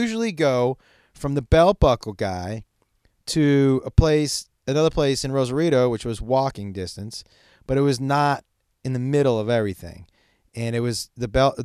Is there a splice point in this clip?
no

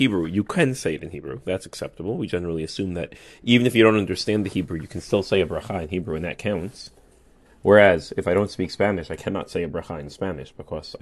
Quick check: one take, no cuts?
yes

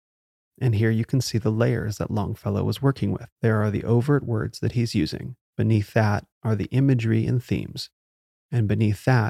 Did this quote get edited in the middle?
yes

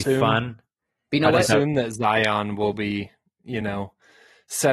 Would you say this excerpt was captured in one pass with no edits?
yes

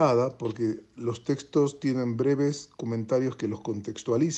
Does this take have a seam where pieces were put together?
no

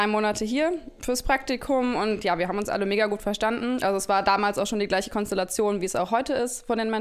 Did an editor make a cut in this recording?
no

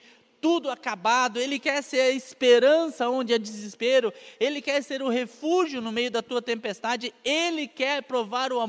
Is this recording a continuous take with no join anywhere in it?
yes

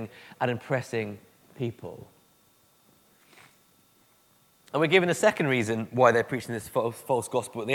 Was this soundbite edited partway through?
no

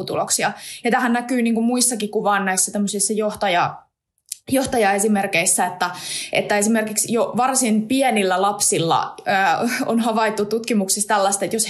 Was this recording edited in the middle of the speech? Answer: no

